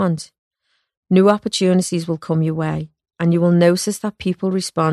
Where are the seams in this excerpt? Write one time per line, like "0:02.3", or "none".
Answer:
none